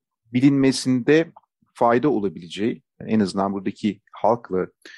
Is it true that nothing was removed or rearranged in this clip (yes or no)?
yes